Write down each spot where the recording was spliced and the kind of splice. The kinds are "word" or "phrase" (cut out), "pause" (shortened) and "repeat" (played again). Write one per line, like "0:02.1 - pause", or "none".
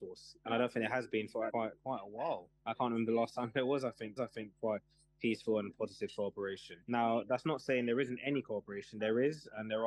0:01.5 - word
0:02.6 - pause
0:04.2 - repeat
0:06.8 - pause

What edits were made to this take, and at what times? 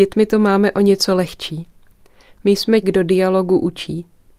0:02.8 - word

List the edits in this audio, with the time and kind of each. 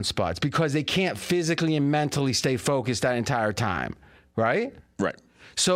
none

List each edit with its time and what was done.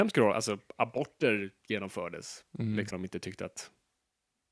0:02.9 - word

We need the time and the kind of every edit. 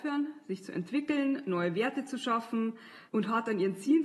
0:03.1 - pause

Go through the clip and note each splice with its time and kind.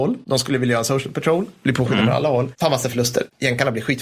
none

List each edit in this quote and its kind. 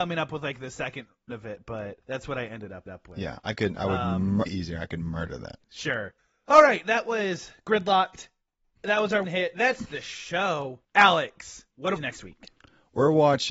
0:01.3 - word
0:02.0 - pause
0:02.9 - repeat
0:04.5 - phrase
0:09.2 - word
0:12.0 - phrase

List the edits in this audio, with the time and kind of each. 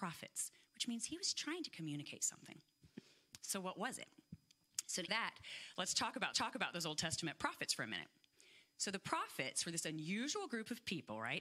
0:05.1 - word
0:06.3 - repeat

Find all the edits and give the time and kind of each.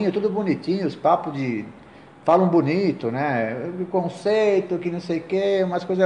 none

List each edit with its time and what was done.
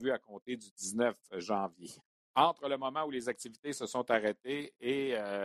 0:02.1 - pause

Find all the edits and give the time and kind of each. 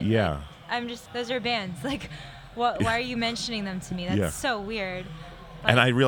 0:01.1 - phrase

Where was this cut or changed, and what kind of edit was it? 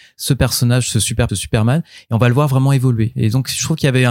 0:01.3 - phrase

